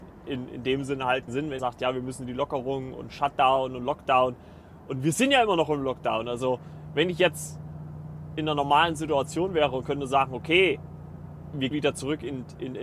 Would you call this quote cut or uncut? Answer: cut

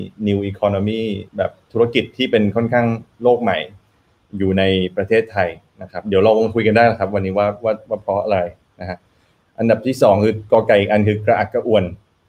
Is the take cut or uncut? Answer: cut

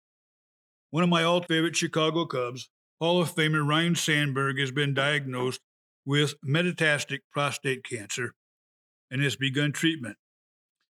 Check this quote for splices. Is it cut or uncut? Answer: cut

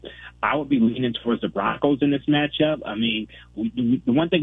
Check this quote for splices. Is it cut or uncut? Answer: uncut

